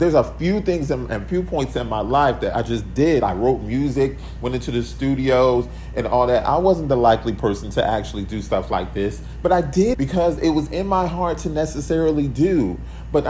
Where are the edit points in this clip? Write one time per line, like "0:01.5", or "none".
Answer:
0:09.9